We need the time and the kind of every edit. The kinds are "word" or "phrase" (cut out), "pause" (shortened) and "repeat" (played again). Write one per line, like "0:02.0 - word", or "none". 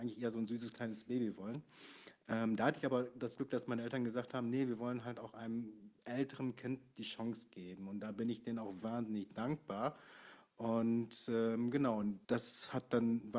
0:08.8 - word
0:12.2 - pause